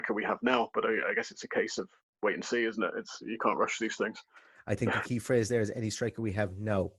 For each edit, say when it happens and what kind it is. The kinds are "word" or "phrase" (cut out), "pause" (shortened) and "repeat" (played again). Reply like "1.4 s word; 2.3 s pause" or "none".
none